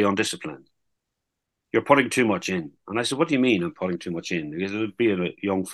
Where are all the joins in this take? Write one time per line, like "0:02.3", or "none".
none